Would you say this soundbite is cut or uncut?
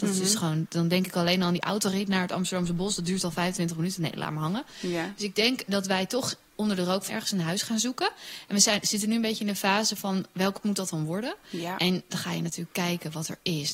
cut